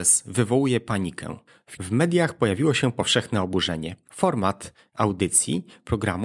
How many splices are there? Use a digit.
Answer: 1